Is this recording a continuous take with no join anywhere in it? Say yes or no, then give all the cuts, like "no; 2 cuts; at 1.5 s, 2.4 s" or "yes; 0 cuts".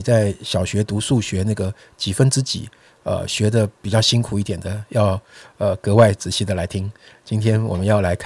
yes; 0 cuts